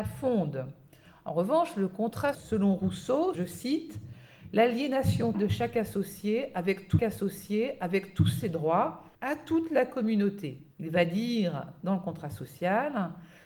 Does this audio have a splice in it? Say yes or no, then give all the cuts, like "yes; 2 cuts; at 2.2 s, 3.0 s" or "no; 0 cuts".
yes; 6 cuts; at 2.3 s, 3.3 s, 5.3 s, 7.0 s, 9.1 s, 10.7 s